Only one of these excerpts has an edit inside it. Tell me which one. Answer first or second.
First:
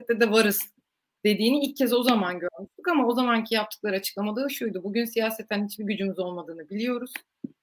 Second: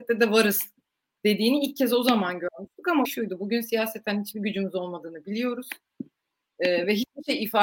second